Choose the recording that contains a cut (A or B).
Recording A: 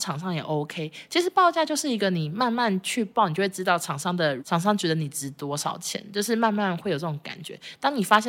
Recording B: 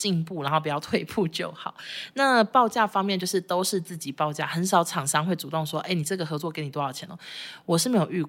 A